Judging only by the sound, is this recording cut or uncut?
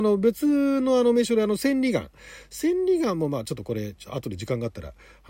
uncut